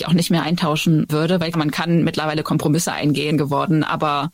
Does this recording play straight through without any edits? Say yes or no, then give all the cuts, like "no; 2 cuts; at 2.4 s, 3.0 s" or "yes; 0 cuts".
no; 3 cuts; at 1.1 s, 1.5 s, 3.3 s